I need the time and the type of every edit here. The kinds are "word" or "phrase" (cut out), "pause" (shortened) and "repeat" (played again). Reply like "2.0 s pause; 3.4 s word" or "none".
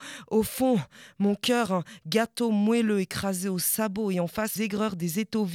4.6 s word